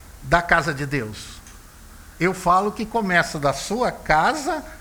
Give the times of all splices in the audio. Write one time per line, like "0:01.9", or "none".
none